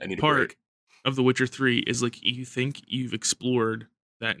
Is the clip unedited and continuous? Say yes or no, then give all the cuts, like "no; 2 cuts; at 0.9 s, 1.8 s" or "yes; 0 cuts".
yes; 0 cuts